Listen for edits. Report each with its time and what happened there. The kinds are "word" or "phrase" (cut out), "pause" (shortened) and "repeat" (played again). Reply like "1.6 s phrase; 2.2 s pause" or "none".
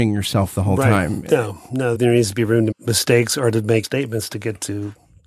1.9 s phrase; 2.7 s word; 3.8 s word